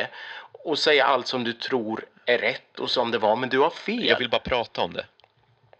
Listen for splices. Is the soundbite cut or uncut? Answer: uncut